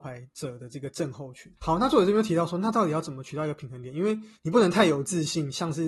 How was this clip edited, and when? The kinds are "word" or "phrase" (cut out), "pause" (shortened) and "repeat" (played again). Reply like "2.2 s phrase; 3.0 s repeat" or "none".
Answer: 4.4 s pause